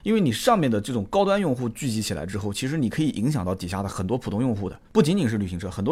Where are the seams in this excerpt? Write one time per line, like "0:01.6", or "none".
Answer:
0:04.9